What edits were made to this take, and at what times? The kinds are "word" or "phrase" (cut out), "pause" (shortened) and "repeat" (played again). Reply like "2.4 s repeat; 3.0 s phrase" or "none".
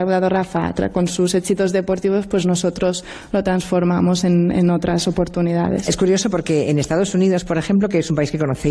none